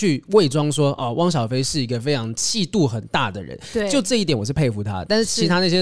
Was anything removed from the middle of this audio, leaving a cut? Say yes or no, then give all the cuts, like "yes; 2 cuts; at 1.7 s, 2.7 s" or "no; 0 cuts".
no; 0 cuts